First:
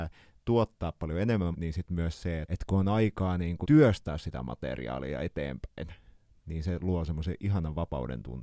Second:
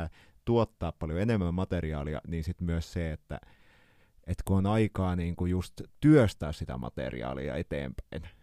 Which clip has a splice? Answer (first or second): first